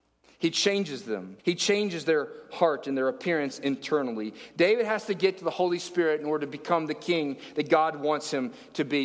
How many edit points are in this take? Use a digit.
1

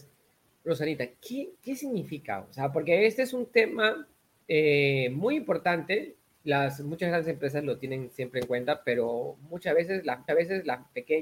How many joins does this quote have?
1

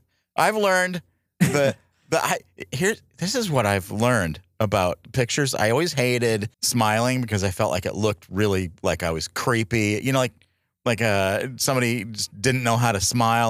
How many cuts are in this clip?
1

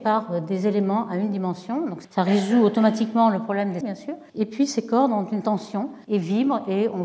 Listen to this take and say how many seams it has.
5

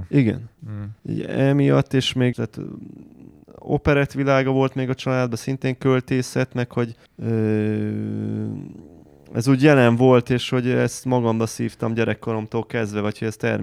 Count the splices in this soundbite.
3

